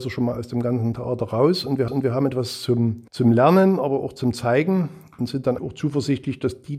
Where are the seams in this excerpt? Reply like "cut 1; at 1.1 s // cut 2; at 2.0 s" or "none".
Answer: cut 1; at 1.9 s // cut 2; at 3.1 s // cut 3; at 5.6 s

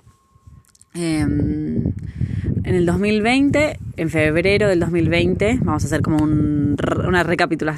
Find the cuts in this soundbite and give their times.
cut 1; at 2.5 s // cut 2; at 3.9 s

